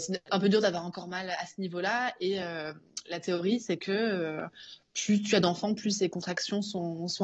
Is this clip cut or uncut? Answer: uncut